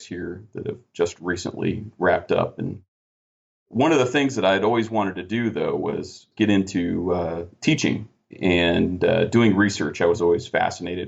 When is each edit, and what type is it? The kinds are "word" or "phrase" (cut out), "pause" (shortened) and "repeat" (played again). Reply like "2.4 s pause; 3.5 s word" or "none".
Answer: none